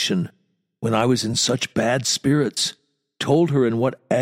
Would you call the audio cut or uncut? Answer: uncut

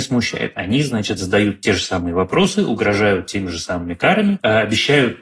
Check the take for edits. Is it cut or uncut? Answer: uncut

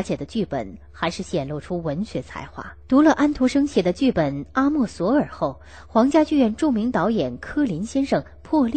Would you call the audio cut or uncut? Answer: cut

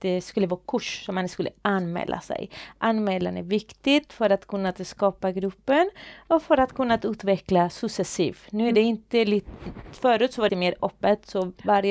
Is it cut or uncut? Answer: cut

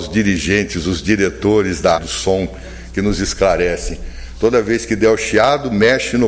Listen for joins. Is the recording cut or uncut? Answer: cut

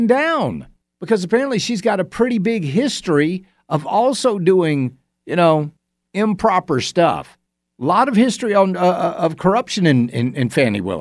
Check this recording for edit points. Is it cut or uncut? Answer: uncut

